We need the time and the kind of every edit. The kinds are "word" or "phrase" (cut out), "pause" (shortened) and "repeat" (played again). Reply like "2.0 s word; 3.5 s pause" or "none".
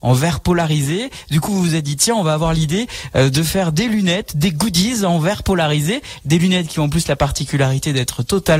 1.5 s word